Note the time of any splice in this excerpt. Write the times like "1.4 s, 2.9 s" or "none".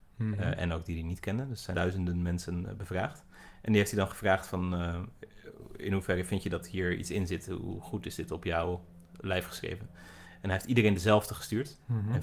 1.7 s

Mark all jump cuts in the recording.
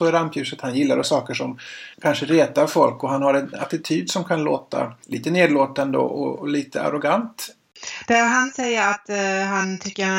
1.0 s, 1.9 s, 3.5 s, 5.0 s

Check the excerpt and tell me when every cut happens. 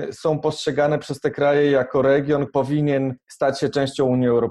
2.5 s

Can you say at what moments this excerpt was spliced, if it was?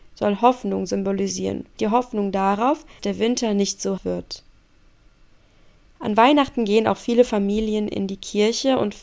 1.8 s, 3.0 s, 4.0 s

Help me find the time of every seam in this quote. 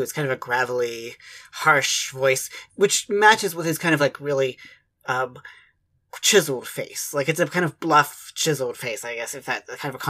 none

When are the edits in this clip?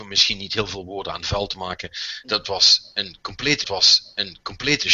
3.6 s

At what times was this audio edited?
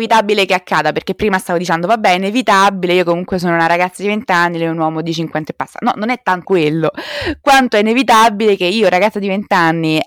6.4 s

